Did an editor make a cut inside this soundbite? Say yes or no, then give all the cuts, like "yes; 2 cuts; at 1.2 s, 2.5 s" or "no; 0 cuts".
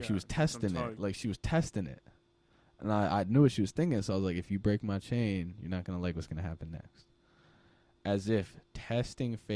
no; 0 cuts